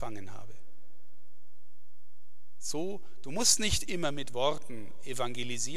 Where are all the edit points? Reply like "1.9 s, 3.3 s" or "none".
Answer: none